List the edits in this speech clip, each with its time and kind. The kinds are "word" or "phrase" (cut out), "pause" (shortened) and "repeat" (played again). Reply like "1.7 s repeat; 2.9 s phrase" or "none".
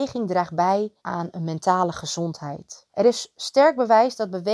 1.0 s pause; 2.9 s pause

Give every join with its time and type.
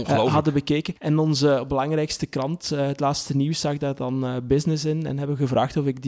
1.0 s pause

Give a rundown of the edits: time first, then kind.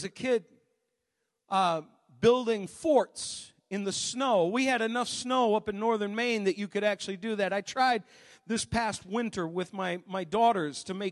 none

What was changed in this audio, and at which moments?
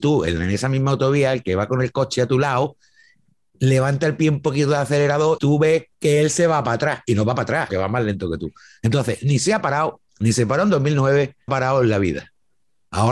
5.4 s word; 5.9 s pause; 7.7 s word; 10.1 s pause; 11.5 s phrase

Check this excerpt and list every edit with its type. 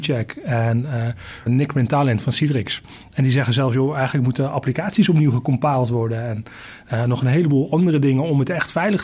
1.5 s word

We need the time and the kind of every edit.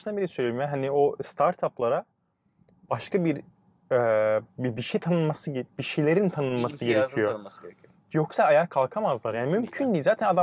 4.5 s pause

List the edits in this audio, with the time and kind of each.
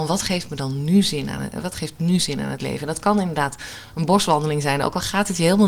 none

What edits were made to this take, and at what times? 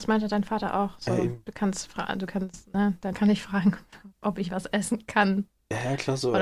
3.1 s word; 4.1 s pause

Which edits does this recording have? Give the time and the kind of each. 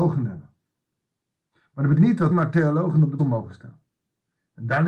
2.0 s word; 2.3 s word; 3.2 s word

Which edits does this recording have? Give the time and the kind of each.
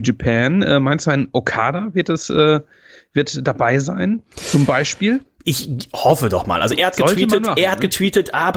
none

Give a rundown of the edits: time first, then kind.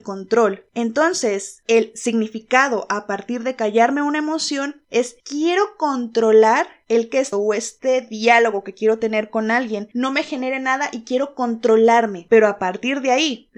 7.3 s phrase

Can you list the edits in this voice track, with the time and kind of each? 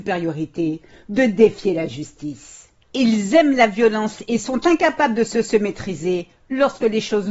5.3 s repeat

